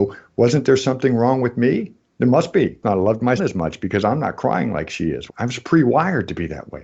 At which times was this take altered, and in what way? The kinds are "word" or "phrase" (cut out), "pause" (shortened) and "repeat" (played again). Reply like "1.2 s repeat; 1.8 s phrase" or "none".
2.8 s phrase; 3.4 s word; 5.3 s word